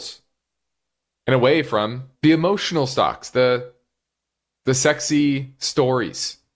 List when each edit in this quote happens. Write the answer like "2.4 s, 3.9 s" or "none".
2.1 s